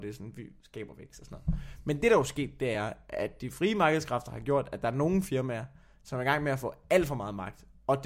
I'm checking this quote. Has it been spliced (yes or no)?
no